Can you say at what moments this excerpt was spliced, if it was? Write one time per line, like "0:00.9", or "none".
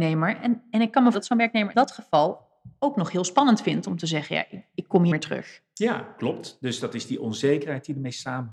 0:01.1
0:01.7
0:05.1